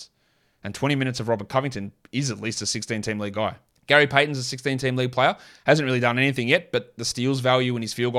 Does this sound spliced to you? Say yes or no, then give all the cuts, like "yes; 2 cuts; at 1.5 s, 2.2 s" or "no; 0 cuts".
yes; 1 cut; at 3.7 s